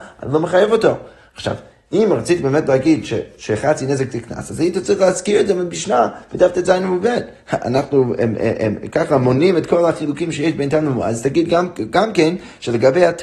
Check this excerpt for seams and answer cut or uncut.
uncut